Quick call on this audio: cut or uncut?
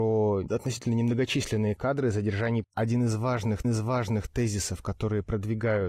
cut